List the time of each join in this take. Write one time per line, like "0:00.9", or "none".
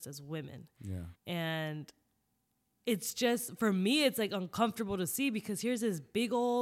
0:01.2